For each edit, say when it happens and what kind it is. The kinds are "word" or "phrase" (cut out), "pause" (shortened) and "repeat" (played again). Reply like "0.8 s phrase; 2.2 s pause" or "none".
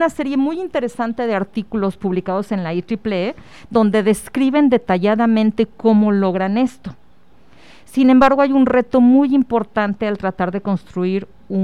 none